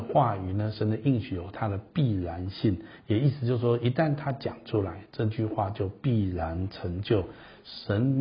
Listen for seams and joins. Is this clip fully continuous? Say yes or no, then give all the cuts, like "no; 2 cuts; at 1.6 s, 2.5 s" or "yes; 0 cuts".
yes; 0 cuts